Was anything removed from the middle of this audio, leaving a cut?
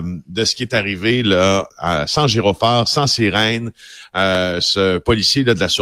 yes; 1 cut; at 1.7 s

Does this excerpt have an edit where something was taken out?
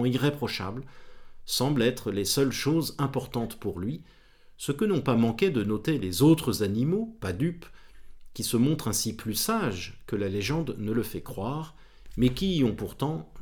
no; 0 cuts

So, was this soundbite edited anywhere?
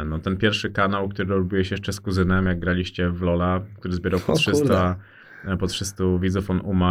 no; 0 cuts

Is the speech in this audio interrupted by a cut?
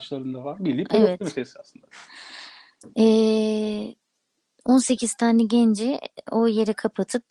yes; 1 cut; at 4.1 s

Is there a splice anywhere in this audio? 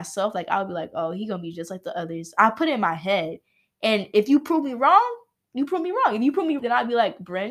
yes; 1 cut; at 6.6 s

